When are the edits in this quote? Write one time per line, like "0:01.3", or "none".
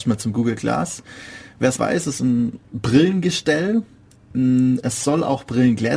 0:01.8
0:02.2